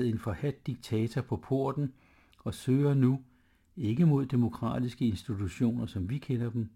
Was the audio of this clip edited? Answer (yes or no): no